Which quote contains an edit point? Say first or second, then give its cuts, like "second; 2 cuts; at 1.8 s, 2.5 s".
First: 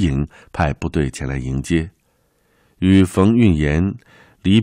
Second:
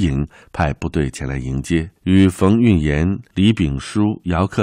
second; 2 cuts; at 2.0 s, 3.3 s